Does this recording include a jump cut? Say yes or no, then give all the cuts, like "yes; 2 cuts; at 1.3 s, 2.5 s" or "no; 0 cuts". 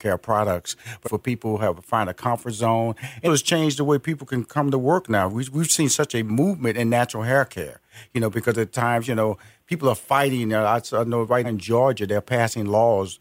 yes; 3 cuts; at 1.0 s, 3.2 s, 11.4 s